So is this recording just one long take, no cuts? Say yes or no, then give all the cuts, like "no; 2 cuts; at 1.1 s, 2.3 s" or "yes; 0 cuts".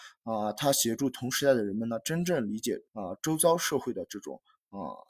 no; 1 cut; at 2.9 s